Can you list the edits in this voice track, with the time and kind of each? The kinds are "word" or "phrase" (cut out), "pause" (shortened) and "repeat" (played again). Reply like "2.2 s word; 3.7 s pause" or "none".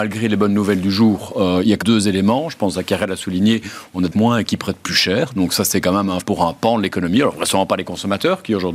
1.8 s word; 4.1 s phrase; 6.2 s word